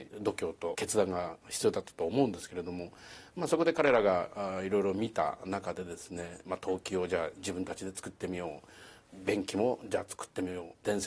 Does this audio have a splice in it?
no; 0 cuts

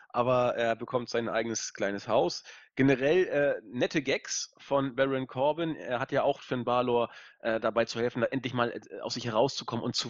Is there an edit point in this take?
yes; 1 cut; at 6.4 s

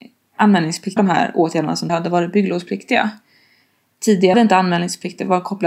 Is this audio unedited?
no; 3 cuts; at 1.0 s, 1.9 s, 4.3 s

